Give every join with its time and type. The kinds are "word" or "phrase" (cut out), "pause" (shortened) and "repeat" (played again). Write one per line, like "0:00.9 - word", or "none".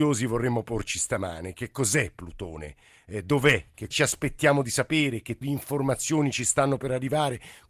0:03.9 - word
0:05.4 - word